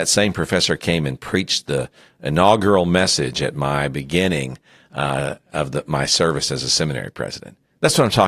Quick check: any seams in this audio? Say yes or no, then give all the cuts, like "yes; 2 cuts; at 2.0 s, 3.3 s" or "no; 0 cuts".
no; 0 cuts